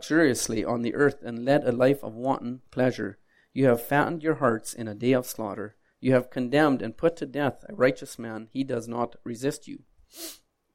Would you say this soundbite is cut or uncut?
uncut